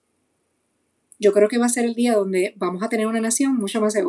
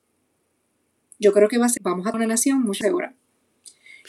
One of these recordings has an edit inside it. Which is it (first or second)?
second